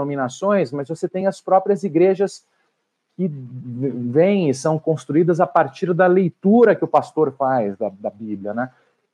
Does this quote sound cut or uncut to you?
uncut